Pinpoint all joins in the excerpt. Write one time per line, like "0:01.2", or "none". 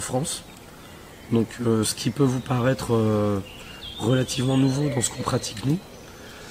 none